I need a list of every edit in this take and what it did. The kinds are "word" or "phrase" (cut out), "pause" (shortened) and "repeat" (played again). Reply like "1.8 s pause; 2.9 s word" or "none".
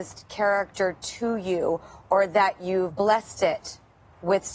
none